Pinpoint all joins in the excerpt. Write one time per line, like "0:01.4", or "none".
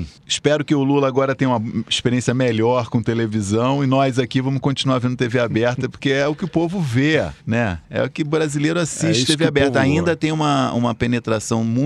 0:07.4